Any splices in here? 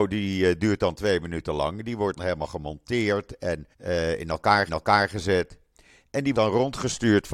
yes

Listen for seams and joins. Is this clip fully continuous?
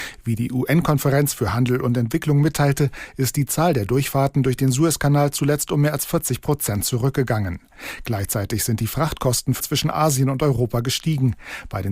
no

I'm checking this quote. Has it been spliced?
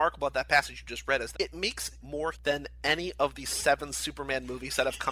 yes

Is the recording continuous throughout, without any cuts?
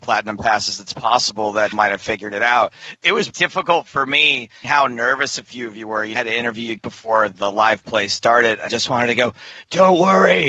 no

